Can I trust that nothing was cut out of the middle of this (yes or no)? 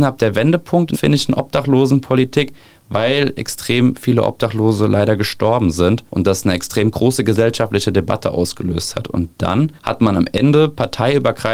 no